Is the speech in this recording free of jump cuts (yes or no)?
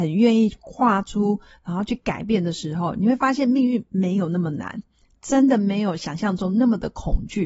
yes